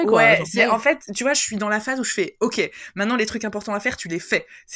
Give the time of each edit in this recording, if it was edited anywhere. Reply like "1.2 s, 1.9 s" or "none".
none